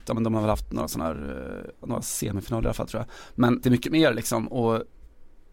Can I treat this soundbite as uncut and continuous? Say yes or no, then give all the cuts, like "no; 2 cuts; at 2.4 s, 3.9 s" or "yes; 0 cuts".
no; 1 cut; at 3.6 s